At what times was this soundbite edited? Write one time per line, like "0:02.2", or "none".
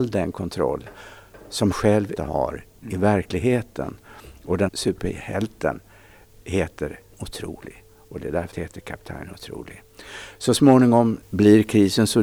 0:01.7
0:02.2
0:04.7
0:07.1
0:08.5
0:11.2